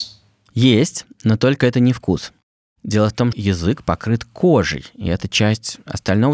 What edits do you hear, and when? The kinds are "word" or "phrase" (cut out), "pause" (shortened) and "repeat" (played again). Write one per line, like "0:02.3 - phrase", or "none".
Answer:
0:03.3 - word